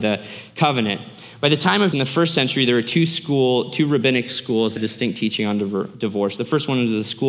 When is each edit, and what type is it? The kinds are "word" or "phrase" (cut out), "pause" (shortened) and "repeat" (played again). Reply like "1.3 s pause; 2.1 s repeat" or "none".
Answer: 1.9 s word; 4.8 s phrase